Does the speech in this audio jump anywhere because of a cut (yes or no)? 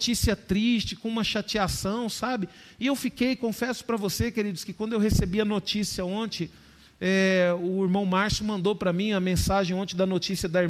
no